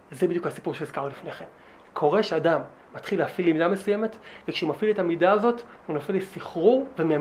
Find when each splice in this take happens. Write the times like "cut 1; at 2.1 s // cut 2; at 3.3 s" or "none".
none